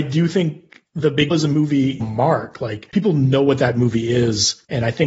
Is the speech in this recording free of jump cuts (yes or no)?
no